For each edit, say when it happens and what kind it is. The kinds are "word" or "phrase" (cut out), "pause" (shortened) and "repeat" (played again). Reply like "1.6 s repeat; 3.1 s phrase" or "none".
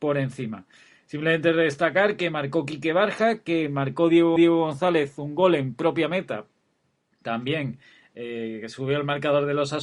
4.4 s repeat